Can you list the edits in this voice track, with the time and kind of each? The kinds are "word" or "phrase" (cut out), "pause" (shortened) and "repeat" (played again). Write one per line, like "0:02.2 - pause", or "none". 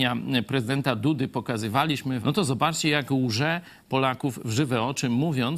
0:02.2 - word